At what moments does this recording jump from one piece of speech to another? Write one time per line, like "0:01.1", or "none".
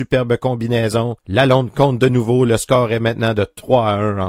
none